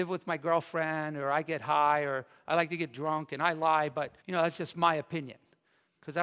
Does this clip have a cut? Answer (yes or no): yes